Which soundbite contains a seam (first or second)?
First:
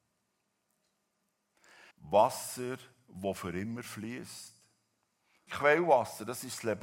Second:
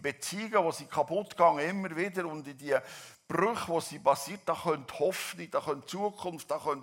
first